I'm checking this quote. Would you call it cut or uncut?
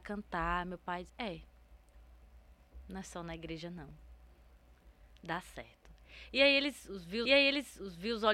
cut